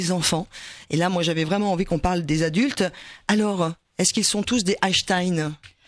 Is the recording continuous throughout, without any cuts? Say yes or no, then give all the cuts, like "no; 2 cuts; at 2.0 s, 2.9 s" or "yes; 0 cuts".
yes; 0 cuts